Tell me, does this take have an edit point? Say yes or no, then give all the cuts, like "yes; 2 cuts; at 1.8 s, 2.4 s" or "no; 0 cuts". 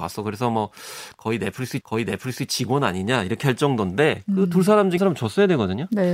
yes; 2 cuts; at 1.8 s, 5.0 s